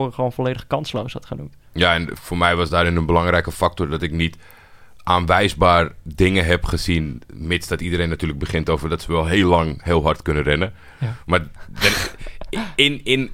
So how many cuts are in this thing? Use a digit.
1